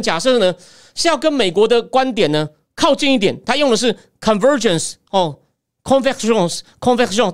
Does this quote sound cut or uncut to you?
uncut